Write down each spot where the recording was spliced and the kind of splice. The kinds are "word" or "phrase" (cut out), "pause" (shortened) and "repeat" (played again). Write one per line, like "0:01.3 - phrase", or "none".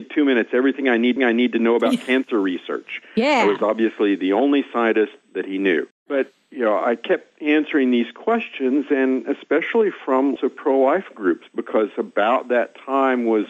0:01.2 - repeat
0:10.4 - word

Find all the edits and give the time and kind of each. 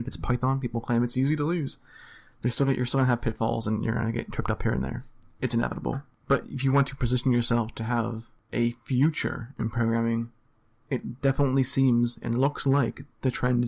none

